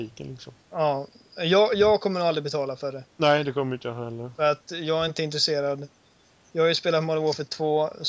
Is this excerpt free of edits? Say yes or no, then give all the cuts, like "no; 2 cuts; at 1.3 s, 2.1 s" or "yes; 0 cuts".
yes; 0 cuts